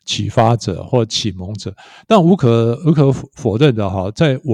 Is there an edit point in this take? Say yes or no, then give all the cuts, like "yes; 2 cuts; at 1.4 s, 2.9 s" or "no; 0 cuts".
no; 0 cuts